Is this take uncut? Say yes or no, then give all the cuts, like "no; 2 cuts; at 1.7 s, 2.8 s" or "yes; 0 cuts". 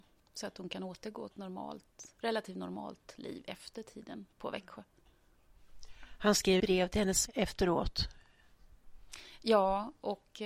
no; 4 cuts; at 1.3 s, 4.3 s, 6.6 s, 7.3 s